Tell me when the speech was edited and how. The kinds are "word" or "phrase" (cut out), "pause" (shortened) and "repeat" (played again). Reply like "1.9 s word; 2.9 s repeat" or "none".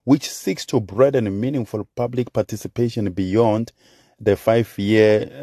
none